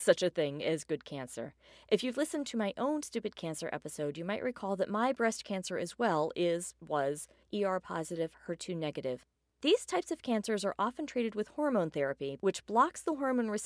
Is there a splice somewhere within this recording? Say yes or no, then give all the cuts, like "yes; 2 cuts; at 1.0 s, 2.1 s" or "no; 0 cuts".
no; 0 cuts